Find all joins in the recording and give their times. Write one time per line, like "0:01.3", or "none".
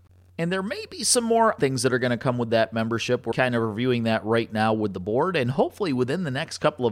0:01.6
0:03.3